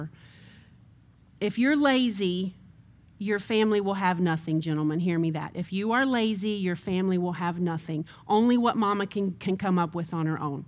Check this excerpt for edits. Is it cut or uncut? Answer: uncut